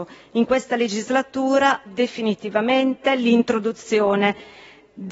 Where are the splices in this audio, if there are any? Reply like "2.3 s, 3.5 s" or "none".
1.9 s